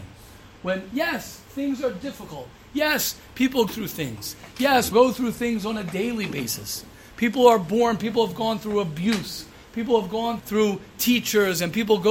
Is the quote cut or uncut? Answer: cut